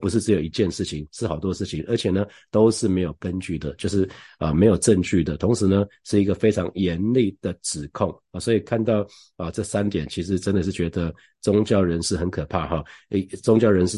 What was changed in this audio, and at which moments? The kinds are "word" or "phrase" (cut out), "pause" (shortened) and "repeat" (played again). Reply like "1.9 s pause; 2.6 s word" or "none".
none